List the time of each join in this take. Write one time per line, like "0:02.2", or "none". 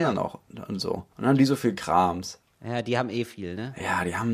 0:01.1